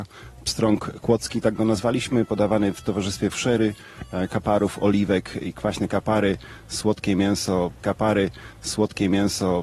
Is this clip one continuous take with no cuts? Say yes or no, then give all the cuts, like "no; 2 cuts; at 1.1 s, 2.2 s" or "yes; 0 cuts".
no; 3 cuts; at 3.3 s, 5.5 s, 7.8 s